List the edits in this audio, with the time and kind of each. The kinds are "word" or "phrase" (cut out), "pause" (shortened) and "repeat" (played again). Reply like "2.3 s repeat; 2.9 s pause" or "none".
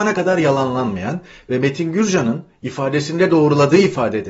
none